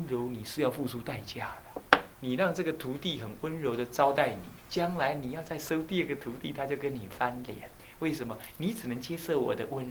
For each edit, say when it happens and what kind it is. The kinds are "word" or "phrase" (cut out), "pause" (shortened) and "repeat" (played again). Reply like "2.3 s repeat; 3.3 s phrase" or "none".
2.1 s pause; 4.6 s pause; 7.8 s pause